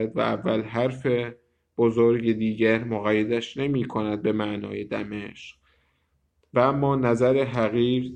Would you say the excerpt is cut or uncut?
uncut